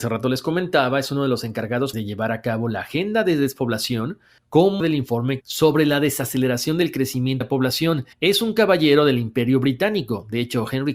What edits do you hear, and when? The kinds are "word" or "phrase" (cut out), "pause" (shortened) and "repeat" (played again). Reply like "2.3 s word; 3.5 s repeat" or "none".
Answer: 1.9 s word; 4.8 s word; 5.4 s word; 7.4 s word; 8.1 s pause